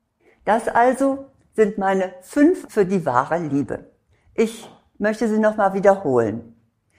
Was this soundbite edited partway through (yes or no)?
yes